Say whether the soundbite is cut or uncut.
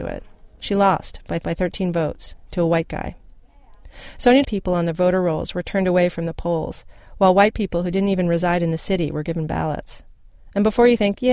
cut